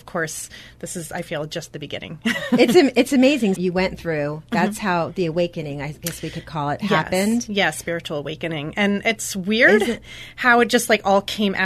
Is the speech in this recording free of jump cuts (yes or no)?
no